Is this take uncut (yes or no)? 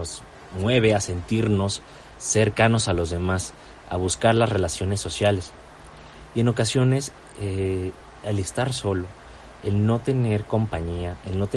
yes